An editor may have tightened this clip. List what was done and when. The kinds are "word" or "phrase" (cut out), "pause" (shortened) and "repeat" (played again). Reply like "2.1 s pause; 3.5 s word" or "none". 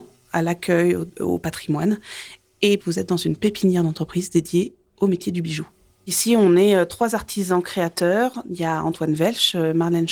2.8 s phrase